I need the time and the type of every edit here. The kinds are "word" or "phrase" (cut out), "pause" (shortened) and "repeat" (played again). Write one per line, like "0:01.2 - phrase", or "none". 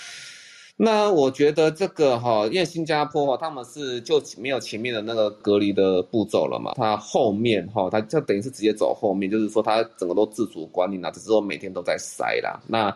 0:06.7 - word